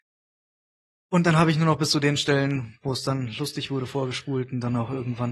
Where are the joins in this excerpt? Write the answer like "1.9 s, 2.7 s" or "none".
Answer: none